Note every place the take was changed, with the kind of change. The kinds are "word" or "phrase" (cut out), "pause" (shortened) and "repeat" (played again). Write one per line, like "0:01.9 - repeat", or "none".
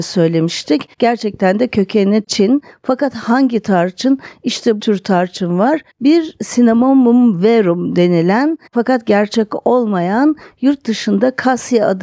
0:00.9 - pause
0:04.8 - phrase
0:05.9 - pause
0:08.7 - pause